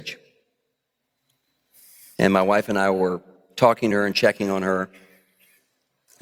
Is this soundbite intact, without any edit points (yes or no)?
yes